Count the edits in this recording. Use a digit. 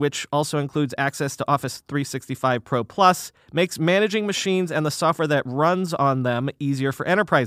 1